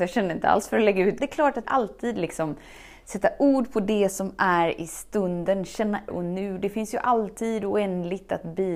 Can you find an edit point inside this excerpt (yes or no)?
yes